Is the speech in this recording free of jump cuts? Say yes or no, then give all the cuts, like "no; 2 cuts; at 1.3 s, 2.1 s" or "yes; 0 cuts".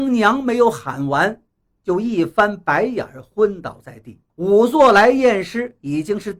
no; 1 cut; at 4.3 s